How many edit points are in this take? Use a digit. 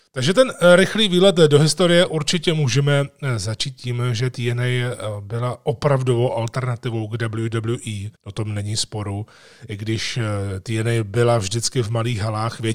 1